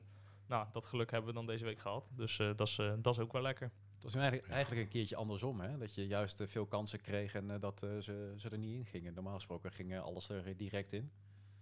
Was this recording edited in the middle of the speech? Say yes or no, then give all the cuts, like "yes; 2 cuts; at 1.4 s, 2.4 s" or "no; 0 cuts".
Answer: no; 0 cuts